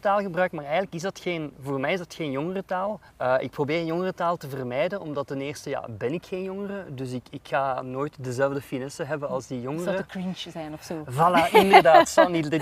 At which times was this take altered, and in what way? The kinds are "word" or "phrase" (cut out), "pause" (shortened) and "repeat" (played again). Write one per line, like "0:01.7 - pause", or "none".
0:03.1 - pause